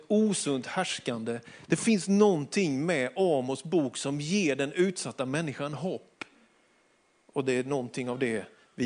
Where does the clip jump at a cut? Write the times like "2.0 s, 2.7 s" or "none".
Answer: none